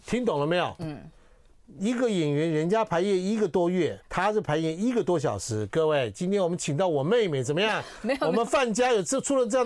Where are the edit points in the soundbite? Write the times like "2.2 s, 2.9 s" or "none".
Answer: 4.0 s